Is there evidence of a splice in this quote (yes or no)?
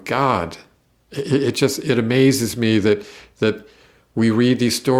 no